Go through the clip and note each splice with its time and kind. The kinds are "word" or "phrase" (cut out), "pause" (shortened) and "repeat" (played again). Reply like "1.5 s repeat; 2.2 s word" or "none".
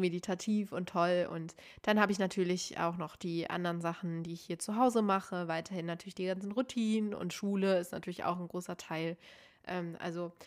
none